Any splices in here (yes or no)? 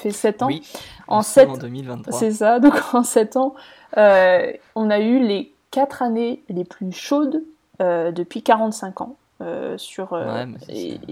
no